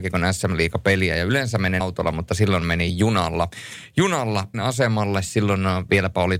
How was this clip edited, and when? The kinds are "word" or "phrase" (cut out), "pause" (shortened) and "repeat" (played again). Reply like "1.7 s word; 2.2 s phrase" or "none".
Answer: 1.8 s word; 4.5 s word